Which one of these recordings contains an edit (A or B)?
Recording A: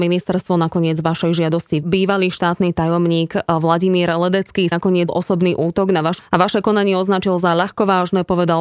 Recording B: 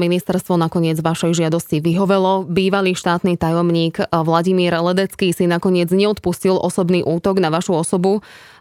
A